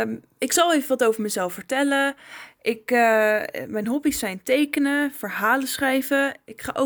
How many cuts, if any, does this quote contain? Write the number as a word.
zero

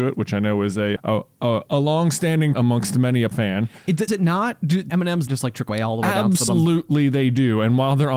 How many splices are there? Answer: nine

